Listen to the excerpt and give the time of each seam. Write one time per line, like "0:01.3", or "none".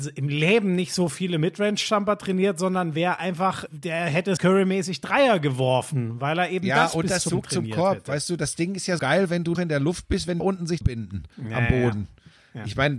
0:03.7
0:04.4
0:07.3
0:09.0
0:09.5
0:10.4
0:10.8
0:11.3